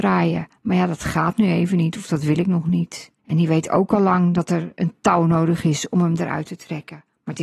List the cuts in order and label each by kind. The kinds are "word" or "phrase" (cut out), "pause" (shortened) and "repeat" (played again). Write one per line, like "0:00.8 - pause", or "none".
0:03.2 - pause